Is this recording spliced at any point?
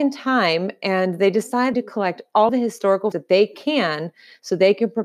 yes; 3 cuts; at 1.7 s, 2.5 s, 3.1 s

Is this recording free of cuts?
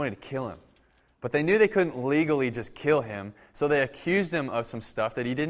yes; 0 cuts

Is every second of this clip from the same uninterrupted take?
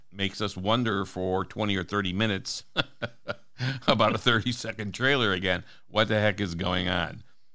yes; 0 cuts

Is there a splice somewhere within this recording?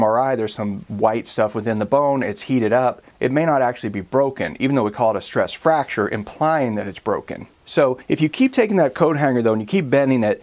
no; 0 cuts

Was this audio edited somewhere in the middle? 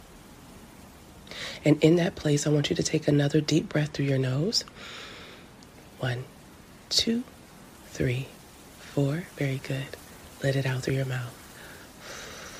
no; 0 cuts

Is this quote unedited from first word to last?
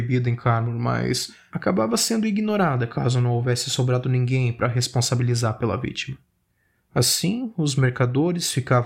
yes; 0 cuts

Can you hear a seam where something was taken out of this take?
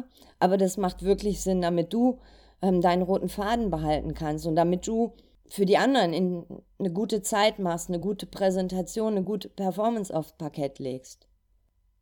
no; 0 cuts

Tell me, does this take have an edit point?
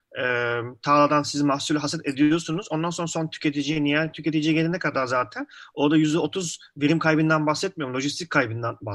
no; 0 cuts

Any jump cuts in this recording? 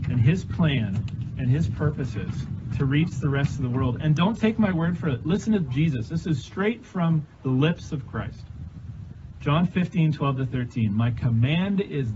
yes; 1 cut; at 7.3 s

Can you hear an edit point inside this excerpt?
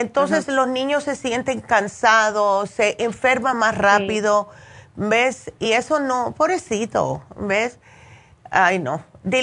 no; 0 cuts

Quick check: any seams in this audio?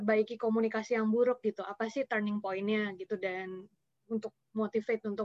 no; 0 cuts

